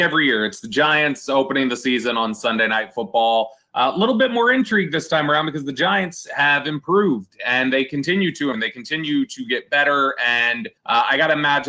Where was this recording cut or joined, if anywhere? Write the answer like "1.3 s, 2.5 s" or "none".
8.5 s, 10.8 s